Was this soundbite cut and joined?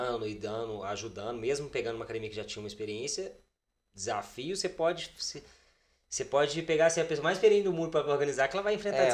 no; 0 cuts

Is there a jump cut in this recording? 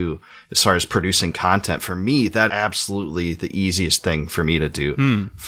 yes; 1 cut; at 2.5 s

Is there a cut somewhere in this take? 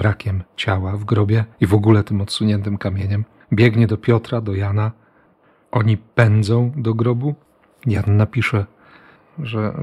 yes; 2 cuts; at 1.5 s, 3.4 s

